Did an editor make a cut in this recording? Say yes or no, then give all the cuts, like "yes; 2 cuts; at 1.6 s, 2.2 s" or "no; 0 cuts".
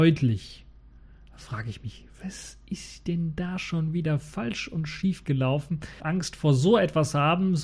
yes; 1 cut; at 6.0 s